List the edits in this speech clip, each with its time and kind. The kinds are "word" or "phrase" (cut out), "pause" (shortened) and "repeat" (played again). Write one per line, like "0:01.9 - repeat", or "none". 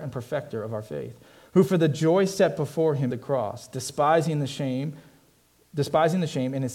0:03.1 - word